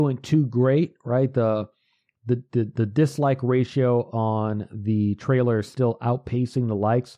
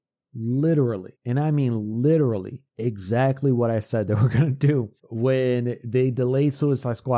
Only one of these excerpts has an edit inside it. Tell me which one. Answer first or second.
second